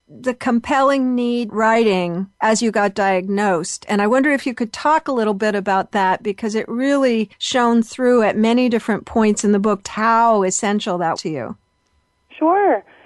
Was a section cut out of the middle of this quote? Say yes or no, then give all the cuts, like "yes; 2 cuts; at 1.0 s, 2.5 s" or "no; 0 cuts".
yes; 5 cuts; at 1.5 s, 2.3 s, 7.3 s, 9.8 s, 11.2 s